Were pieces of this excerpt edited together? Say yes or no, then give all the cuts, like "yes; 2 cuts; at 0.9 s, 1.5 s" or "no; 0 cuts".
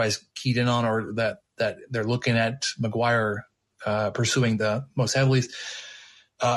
no; 0 cuts